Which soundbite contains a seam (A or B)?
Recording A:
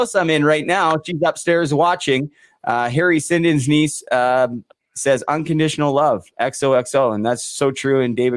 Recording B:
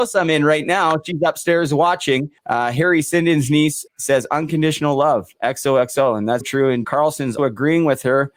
B